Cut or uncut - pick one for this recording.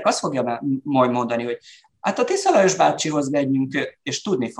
uncut